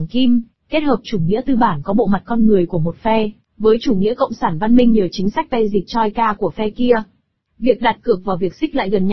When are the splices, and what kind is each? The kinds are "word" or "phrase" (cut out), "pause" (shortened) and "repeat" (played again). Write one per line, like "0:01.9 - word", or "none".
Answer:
none